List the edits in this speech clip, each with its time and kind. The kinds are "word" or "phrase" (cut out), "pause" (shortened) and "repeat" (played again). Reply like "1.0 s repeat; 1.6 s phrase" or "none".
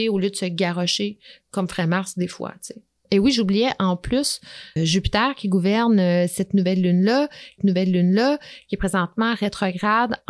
4.8 s word; 7.6 s repeat